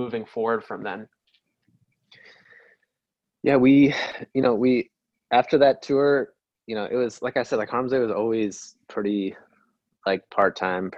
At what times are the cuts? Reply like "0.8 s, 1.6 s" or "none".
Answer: none